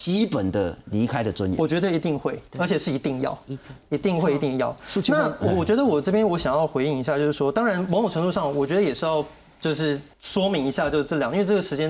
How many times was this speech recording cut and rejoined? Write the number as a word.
two